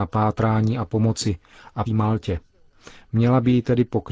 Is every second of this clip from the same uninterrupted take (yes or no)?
no